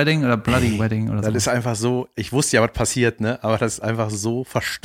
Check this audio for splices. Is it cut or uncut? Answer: uncut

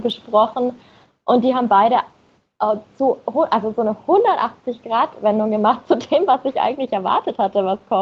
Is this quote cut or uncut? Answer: uncut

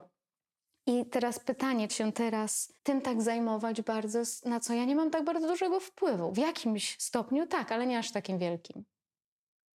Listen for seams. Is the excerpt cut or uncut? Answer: cut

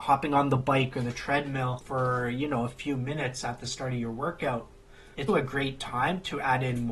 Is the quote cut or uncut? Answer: cut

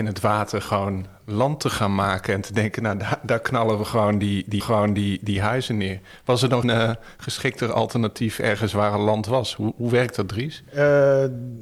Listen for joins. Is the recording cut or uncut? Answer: cut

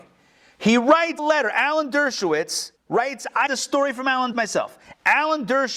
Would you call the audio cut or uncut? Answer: cut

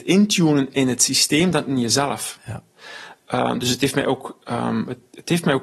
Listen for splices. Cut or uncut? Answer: uncut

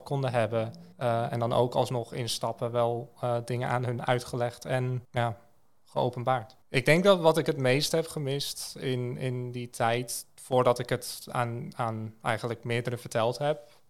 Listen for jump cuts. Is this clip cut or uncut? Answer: cut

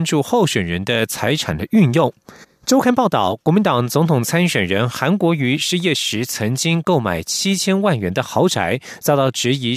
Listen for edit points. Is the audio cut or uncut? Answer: cut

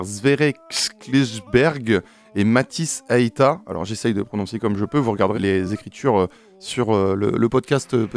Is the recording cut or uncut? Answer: cut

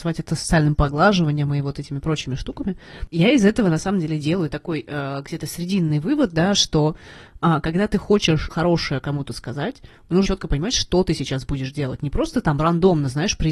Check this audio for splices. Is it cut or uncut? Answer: cut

